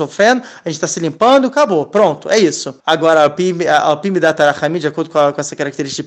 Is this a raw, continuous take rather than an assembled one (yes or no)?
no